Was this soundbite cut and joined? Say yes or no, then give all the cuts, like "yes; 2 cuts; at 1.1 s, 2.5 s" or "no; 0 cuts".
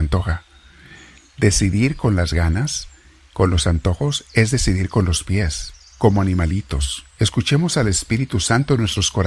yes; 1 cut; at 7.1 s